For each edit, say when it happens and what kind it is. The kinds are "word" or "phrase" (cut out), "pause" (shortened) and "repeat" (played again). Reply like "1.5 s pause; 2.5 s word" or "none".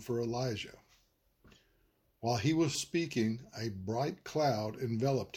2.7 s word